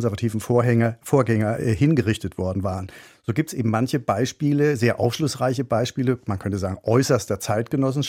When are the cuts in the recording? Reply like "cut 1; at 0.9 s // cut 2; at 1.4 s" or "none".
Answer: none